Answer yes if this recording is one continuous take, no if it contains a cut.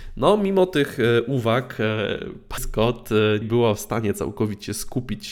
no